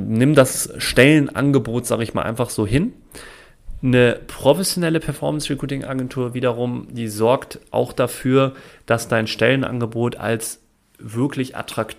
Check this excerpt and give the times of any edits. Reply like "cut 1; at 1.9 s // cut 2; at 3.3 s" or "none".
none